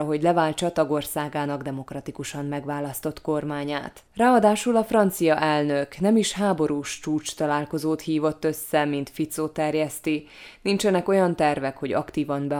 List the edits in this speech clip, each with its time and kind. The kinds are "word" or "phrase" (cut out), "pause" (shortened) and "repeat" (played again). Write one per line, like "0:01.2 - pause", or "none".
0:04.1 - pause